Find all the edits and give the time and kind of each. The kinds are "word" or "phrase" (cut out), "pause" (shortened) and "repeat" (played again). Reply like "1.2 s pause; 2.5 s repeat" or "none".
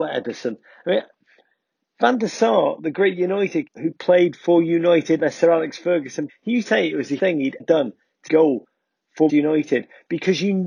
3.7 s word; 5.2 s word; 6.3 s word; 6.6 s word; 7.2 s word; 7.6 s word; 8.3 s word; 9.3 s word